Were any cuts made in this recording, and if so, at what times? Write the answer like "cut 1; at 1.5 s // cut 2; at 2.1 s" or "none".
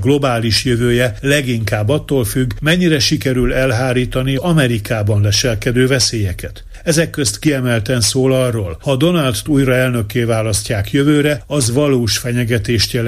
cut 1; at 4.4 s // cut 2; at 9.5 s